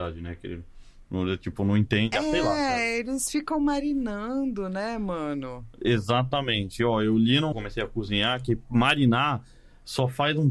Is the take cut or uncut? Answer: cut